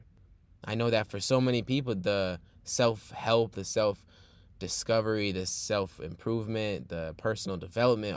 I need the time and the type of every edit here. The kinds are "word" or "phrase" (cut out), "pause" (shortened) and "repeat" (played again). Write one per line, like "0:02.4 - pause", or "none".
none